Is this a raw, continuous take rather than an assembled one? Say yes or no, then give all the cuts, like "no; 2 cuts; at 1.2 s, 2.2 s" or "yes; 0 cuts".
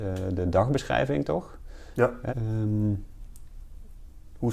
no; 1 cut; at 2.3 s